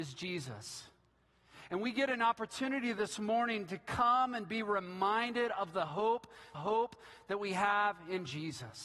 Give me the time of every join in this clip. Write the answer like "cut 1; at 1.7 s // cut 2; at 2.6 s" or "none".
cut 1; at 6.5 s